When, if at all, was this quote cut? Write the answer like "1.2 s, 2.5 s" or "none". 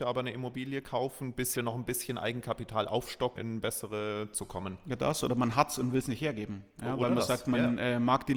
1.5 s, 3.4 s, 4.3 s